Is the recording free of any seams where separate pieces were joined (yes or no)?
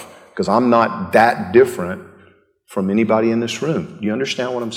yes